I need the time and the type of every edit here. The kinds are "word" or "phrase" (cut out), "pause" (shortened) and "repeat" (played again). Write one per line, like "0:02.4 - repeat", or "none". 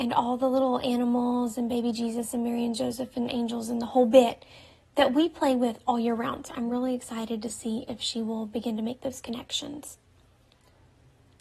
none